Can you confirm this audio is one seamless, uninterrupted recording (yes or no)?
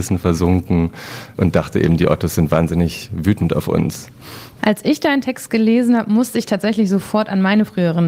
yes